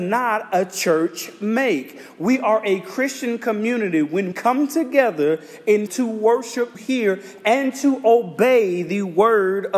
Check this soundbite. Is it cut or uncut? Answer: cut